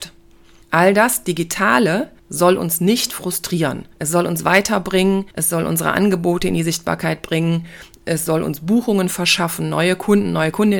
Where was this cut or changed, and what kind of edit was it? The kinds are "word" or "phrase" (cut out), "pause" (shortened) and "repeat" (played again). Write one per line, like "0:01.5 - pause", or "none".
0:02.2 - pause
0:03.9 - pause
0:05.3 - pause